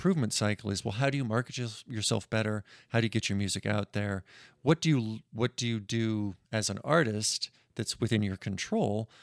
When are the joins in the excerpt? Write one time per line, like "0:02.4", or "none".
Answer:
0:06.4